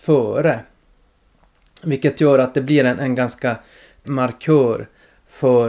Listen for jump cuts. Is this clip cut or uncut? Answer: cut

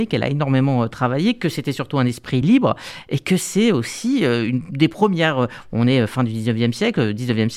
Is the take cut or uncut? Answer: uncut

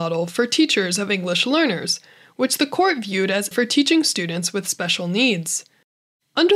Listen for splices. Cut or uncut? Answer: cut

